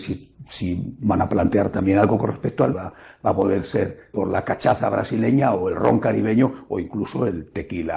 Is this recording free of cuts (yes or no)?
no